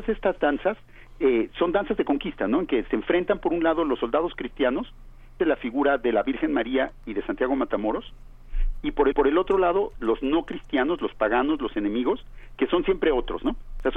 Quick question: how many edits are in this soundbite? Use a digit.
3